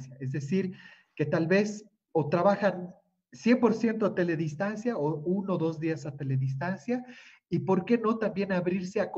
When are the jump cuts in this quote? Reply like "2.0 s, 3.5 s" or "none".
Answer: none